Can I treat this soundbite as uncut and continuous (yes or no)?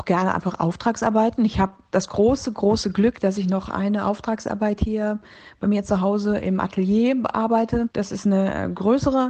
no